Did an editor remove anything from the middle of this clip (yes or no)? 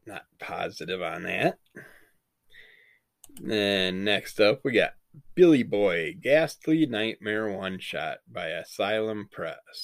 no